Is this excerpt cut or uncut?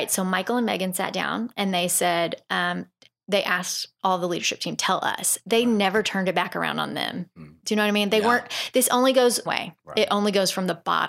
cut